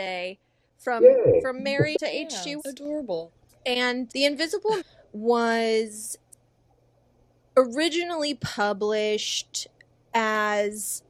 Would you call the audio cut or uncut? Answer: cut